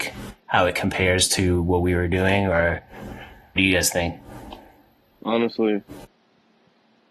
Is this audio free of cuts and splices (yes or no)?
no